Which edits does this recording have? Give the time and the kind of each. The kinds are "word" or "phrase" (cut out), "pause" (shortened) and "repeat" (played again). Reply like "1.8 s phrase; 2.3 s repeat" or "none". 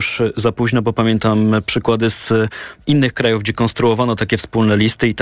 none